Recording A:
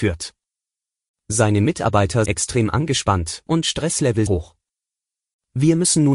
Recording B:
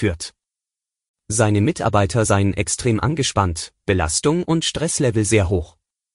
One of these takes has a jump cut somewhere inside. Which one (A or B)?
A